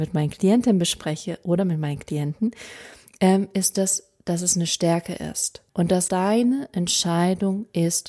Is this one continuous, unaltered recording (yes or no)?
no